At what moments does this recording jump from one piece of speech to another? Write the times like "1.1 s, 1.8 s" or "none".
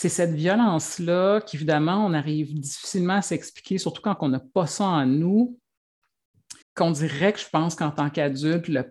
6.6 s